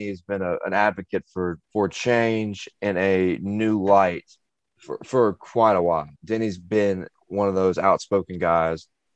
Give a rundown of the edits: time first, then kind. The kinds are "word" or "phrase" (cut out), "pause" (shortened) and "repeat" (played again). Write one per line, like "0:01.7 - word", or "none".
0:01.6 - pause
0:04.5 - pause
0:06.2 - pause